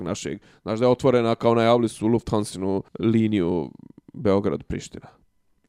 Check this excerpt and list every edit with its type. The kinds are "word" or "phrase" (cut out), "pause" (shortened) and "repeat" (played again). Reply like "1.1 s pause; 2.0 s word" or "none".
2.9 s pause